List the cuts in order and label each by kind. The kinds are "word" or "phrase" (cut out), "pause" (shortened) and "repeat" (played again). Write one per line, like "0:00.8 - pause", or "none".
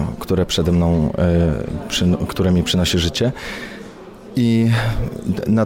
none